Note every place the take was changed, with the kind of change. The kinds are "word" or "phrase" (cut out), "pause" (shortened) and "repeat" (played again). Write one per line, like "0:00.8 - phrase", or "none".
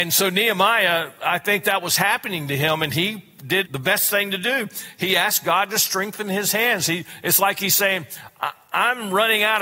0:03.6 - word